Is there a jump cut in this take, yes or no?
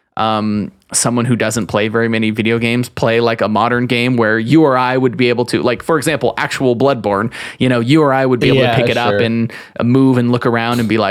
no